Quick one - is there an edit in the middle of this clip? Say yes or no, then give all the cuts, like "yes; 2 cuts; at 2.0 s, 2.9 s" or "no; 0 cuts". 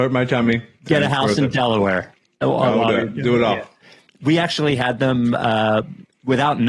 no; 0 cuts